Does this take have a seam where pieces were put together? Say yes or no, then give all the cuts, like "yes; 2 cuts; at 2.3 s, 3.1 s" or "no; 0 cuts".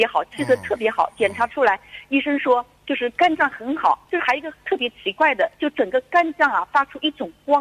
yes; 3 cuts; at 2.8 s, 4.0 s, 5.5 s